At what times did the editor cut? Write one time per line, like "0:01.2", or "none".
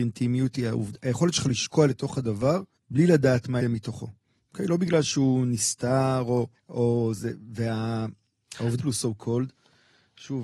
0:02.8
0:03.6
0:06.5
0:08.8